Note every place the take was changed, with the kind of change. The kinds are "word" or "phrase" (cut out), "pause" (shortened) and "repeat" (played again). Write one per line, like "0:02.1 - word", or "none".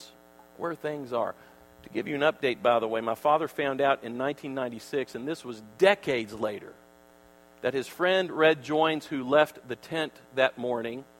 0:05.7 - pause